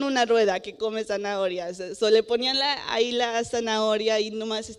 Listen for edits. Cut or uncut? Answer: uncut